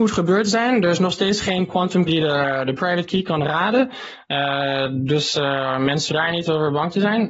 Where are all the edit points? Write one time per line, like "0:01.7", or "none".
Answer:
0:02.1
0:05.1
0:06.1